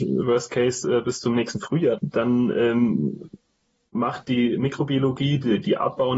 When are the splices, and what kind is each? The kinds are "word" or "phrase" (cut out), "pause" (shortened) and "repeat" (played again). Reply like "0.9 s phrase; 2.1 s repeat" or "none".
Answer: 2.0 s word